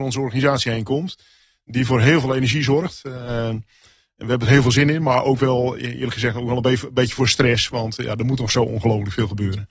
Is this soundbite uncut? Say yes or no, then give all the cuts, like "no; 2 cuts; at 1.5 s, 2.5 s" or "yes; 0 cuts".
yes; 0 cuts